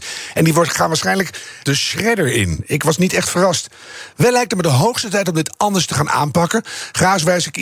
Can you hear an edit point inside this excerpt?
yes; 1 cut; at 1.6 s

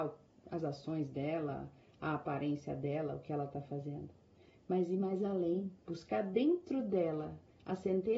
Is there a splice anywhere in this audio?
no; 0 cuts

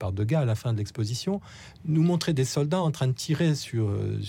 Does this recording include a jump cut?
no; 0 cuts

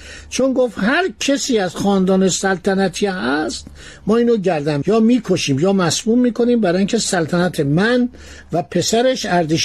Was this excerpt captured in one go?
no; 1 cut; at 4.8 s

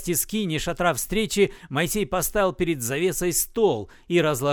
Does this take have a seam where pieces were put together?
no; 0 cuts

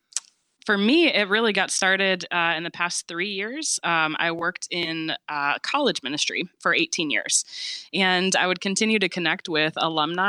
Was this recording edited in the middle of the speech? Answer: no; 0 cuts

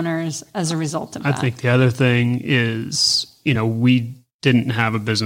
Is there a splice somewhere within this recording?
no; 0 cuts

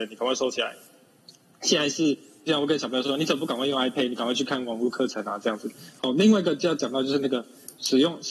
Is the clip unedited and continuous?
yes; 0 cuts

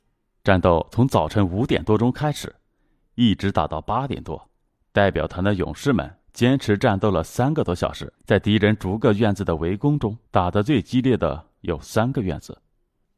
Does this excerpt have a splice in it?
yes; 4 cuts; at 4.7 s, 6.2 s, 8.1 s, 10.3 s

